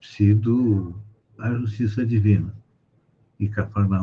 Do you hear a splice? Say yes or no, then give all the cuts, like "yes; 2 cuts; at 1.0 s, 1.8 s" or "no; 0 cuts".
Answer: yes; 1 cut; at 1.4 s